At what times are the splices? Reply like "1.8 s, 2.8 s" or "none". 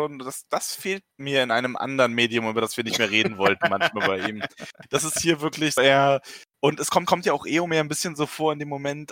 1.1 s, 5.8 s, 6.5 s, 7.1 s